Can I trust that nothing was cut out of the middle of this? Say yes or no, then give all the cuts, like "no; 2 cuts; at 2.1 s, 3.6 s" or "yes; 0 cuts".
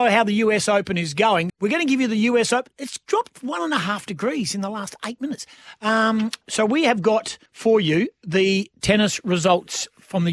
no; 2 cuts; at 1.5 s, 7.5 s